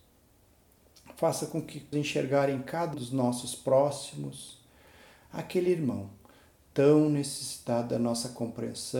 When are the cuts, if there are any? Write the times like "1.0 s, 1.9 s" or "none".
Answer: 1.9 s, 2.9 s